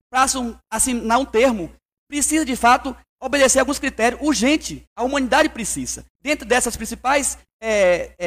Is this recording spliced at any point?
yes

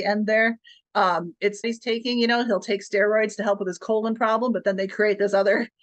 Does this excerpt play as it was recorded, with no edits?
no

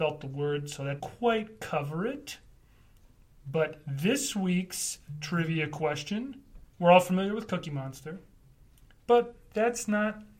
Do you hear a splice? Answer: yes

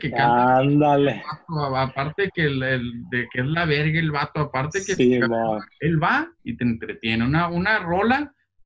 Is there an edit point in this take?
yes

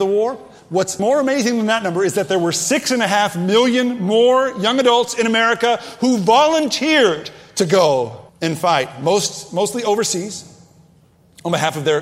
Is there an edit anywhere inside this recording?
yes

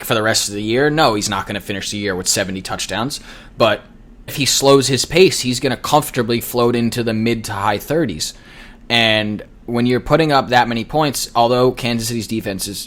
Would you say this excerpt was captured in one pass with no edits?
no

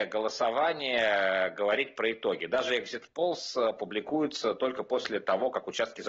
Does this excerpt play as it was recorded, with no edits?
yes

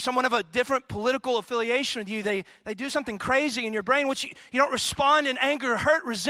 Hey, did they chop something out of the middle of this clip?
no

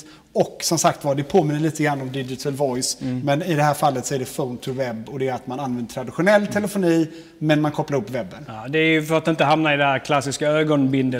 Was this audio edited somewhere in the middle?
no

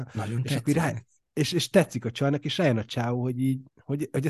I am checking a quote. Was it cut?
no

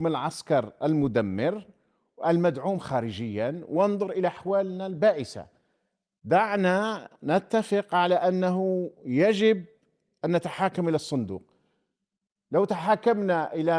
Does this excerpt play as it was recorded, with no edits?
yes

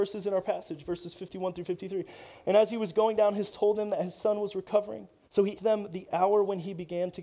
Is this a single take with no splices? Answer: no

